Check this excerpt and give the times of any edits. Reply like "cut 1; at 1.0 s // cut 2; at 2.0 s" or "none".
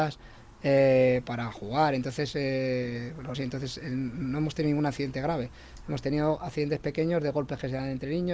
cut 1; at 1.2 s // cut 2; at 3.3 s